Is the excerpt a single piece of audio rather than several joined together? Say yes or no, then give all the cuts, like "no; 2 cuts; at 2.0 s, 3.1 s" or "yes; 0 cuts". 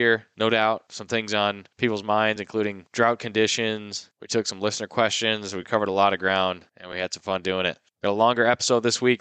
yes; 0 cuts